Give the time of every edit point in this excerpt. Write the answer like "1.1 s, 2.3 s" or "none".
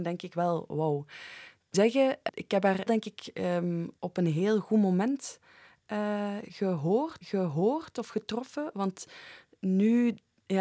1.7 s, 2.3 s, 2.9 s, 4.0 s, 7.2 s